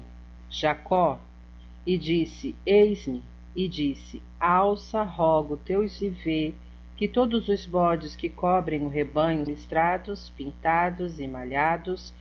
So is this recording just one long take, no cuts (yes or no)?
no